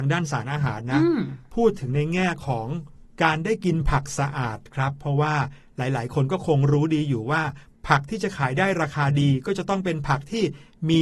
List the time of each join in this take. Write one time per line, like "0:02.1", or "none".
none